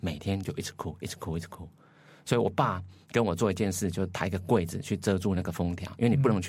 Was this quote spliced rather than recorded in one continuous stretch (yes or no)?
no